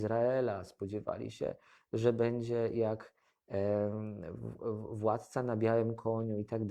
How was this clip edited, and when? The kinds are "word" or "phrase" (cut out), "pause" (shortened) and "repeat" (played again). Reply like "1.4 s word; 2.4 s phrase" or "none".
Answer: none

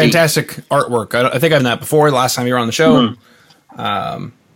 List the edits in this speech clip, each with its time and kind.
1.6 s word

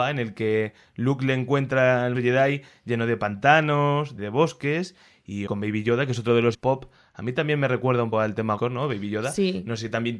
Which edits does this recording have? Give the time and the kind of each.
2.1 s word; 4.2 s word; 5.5 s word; 6.5 s word; 8.1 s word; 8.6 s word

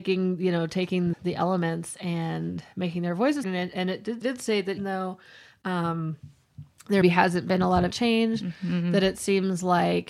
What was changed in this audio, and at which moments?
1.1 s word; 3.4 s word; 4.2 s word; 4.8 s word; 7.0 s word; 7.9 s word

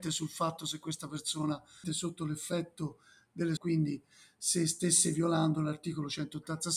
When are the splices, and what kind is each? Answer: 1.8 s phrase; 3.6 s phrase

